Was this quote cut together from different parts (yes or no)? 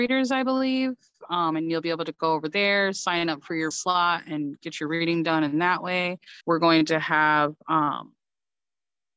yes